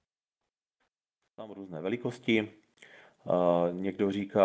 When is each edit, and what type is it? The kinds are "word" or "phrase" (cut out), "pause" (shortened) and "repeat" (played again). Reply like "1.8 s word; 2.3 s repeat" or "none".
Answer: none